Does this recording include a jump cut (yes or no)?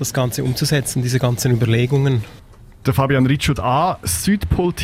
yes